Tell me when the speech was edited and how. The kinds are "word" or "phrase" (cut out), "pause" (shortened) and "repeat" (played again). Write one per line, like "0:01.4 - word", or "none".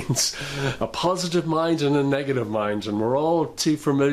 none